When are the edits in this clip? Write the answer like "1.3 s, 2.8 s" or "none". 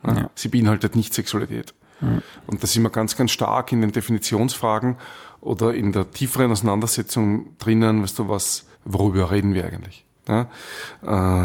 8.7 s, 10.2 s